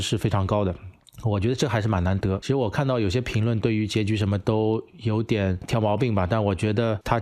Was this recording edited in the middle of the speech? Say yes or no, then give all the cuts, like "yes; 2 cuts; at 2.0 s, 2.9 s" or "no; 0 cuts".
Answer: no; 0 cuts